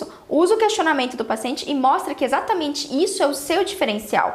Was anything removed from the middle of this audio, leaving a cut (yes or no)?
no